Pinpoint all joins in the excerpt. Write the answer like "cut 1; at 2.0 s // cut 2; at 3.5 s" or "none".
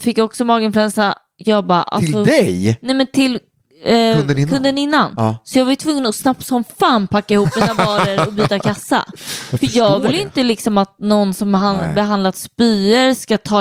none